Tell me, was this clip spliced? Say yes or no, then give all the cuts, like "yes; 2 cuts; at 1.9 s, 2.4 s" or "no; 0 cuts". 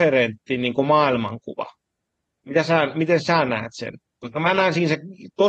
no; 0 cuts